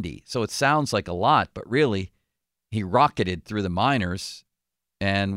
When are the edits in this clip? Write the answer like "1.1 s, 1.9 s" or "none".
none